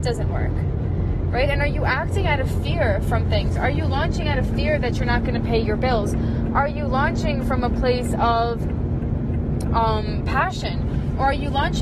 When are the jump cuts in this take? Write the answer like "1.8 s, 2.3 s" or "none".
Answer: none